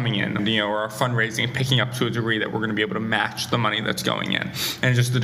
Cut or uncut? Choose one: uncut